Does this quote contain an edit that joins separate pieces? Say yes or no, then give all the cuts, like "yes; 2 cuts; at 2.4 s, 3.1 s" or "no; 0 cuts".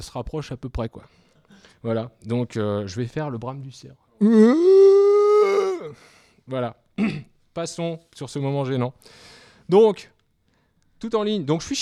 no; 0 cuts